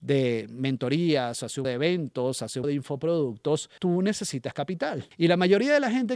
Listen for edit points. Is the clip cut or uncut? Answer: cut